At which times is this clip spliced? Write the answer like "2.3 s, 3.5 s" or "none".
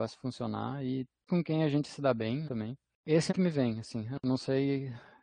1.3 s, 2.4 s, 3.3 s

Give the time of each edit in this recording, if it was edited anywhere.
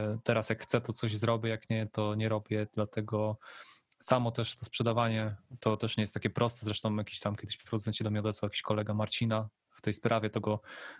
none

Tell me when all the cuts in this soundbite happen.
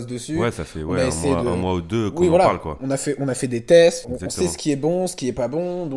4.0 s

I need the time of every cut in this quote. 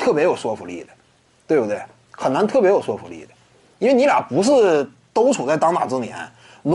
none

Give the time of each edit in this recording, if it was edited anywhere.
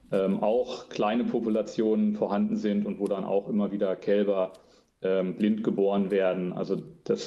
none

